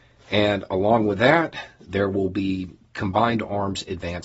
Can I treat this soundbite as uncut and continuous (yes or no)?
yes